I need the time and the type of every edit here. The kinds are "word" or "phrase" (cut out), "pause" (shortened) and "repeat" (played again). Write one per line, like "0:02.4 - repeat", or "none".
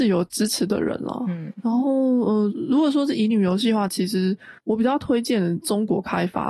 0:04.6 - pause